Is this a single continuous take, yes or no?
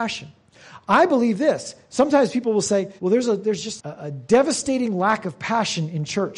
no